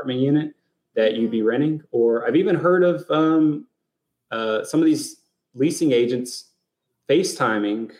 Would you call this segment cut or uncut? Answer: uncut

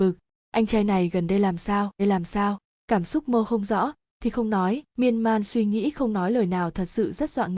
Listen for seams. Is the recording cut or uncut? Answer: cut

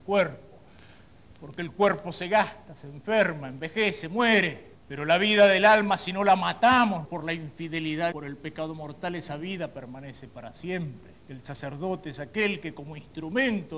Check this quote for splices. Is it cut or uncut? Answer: cut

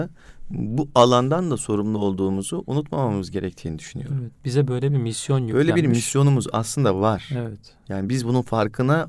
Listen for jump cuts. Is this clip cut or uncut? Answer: uncut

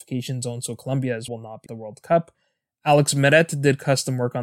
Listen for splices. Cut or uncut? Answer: cut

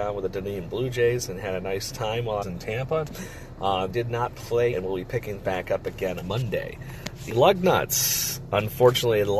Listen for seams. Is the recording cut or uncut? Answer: cut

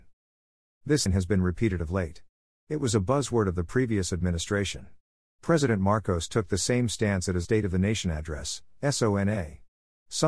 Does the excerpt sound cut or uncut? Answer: cut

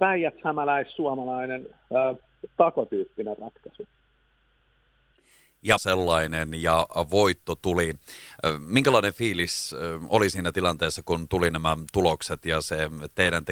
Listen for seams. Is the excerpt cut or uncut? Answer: cut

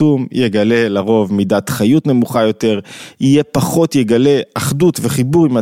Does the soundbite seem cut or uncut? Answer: uncut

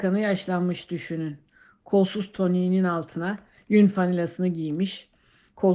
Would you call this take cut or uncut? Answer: uncut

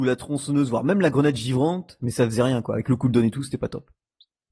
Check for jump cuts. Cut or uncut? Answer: uncut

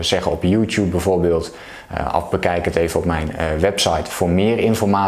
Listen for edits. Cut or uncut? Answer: uncut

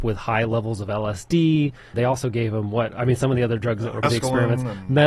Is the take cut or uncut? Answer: cut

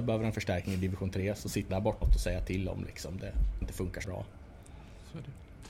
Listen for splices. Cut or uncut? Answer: cut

